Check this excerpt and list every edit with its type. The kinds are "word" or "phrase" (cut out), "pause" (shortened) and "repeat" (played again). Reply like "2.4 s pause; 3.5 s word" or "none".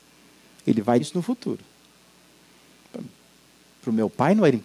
1.0 s word